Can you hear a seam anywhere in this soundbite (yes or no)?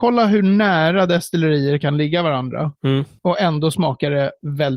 no